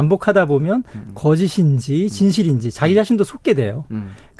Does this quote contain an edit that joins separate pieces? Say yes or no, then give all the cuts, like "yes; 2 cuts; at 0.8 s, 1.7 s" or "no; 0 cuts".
no; 0 cuts